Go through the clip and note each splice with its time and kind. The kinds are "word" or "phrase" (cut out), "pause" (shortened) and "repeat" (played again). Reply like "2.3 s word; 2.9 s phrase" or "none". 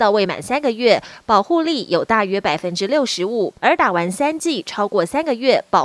3.6 s pause